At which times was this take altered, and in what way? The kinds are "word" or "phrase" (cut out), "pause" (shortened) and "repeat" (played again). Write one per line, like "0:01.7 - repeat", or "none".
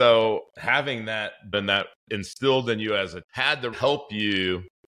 0:01.5 - word
0:02.0 - pause
0:03.2 - word
0:03.7 - word

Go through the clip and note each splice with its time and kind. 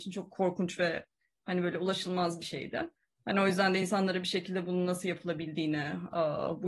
none

